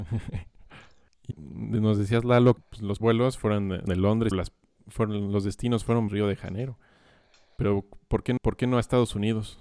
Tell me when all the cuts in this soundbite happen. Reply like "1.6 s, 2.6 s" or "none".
1.3 s, 2.6 s, 3.0 s, 3.9 s, 4.3 s, 6.1 s, 8.4 s

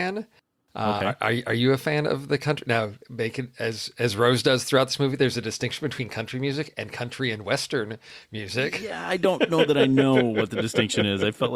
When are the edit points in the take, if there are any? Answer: none

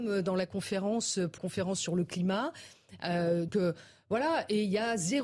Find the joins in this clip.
1.4 s, 3.5 s

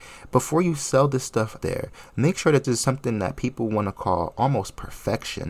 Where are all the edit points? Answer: 1.6 s, 2.6 s

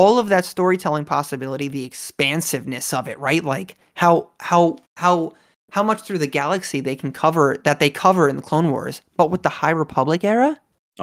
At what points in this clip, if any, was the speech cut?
4.9 s

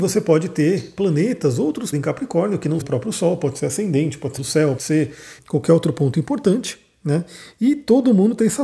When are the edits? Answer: 1.9 s, 2.8 s, 4.4 s, 4.8 s, 5.4 s

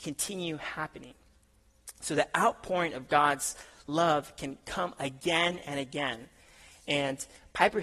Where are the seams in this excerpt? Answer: none

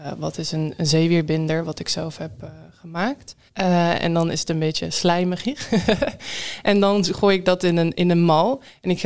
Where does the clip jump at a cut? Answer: 3.5 s

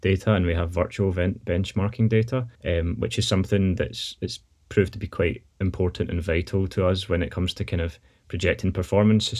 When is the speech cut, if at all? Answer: 2.6 s

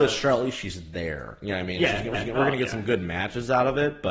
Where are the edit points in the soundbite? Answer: 2.1 s

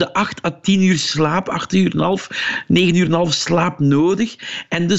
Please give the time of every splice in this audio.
none

